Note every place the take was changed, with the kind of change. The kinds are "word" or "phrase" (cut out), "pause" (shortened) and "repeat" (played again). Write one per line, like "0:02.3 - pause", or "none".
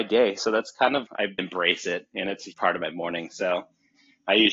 0:01.1 - word
0:01.4 - word
0:02.5 - word